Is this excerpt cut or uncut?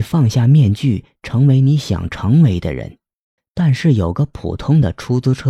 cut